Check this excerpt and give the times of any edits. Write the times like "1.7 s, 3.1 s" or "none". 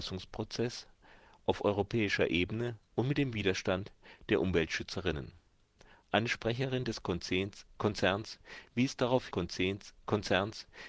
9.3 s